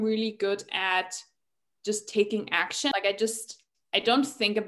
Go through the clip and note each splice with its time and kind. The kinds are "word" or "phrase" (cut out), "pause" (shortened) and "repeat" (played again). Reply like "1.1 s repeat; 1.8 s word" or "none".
none